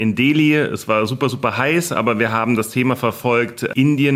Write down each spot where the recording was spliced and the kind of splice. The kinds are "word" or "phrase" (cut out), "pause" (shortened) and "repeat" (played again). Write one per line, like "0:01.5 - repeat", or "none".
none